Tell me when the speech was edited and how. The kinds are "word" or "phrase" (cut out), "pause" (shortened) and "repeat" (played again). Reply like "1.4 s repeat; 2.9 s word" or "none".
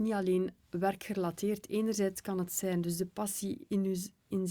none